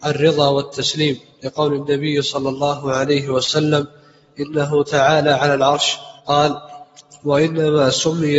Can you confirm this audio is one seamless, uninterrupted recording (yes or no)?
no